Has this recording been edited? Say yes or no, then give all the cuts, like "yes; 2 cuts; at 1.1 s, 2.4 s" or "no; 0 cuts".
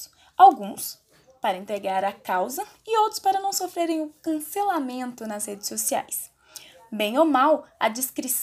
no; 0 cuts